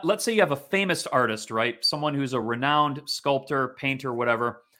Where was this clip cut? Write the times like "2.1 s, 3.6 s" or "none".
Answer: none

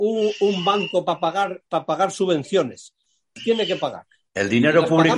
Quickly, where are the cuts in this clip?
1.7 s

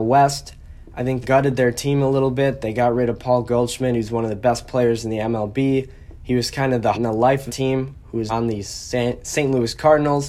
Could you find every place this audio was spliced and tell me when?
1.2 s, 6.9 s, 7.5 s, 8.3 s

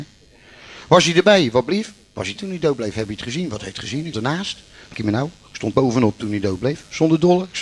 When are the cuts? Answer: 2.4 s, 4.1 s, 4.9 s, 5.7 s

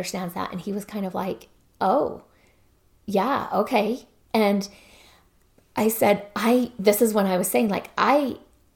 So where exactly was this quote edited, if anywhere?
none

